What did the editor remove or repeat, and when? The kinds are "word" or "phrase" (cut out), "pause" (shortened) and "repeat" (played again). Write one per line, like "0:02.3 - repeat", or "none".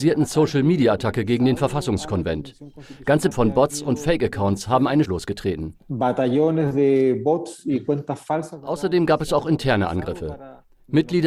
0:03.3 - word
0:05.1 - phrase